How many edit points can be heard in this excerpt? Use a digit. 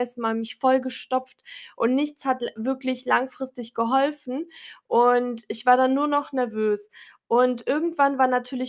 0